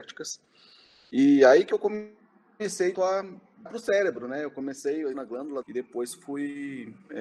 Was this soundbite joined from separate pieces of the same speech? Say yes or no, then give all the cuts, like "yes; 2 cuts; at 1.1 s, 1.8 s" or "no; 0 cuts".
yes; 4 cuts; at 2.9 s, 3.7 s, 5.1 s, 5.6 s